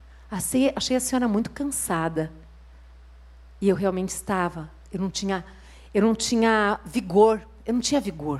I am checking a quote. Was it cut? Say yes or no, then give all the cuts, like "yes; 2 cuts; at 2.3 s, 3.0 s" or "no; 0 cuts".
no; 0 cuts